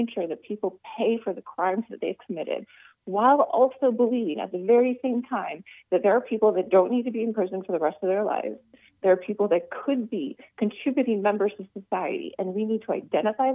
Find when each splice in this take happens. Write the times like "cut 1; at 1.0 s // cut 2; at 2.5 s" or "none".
none